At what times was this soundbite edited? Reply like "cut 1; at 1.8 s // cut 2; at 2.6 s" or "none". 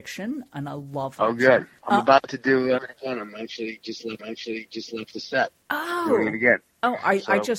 cut 1; at 2.8 s // cut 2; at 4.2 s